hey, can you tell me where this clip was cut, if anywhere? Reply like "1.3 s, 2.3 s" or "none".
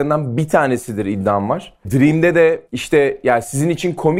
1.8 s, 2.7 s